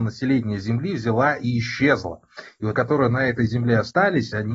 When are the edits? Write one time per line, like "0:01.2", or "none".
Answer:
0:02.7

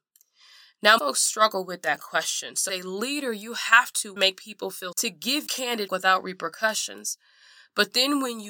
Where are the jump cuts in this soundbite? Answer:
0:01.0
0:02.7
0:04.2
0:04.9
0:05.5
0:05.9

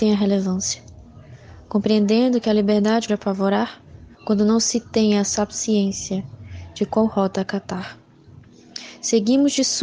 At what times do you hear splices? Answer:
0:03.1
0:04.1

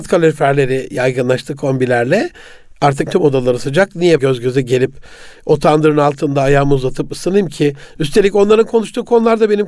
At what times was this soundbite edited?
0:03.1
0:04.2

